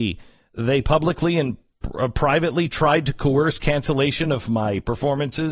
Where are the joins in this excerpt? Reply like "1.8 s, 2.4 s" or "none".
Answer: none